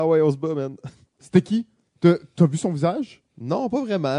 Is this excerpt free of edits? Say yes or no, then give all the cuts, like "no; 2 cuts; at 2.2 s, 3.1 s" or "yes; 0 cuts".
yes; 0 cuts